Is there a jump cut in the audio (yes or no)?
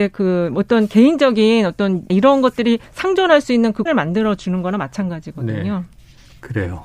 yes